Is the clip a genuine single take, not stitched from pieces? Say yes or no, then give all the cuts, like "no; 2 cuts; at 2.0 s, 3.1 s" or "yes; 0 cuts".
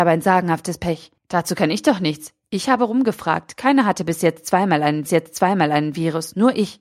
no; 2 cuts; at 1.2 s, 5.1 s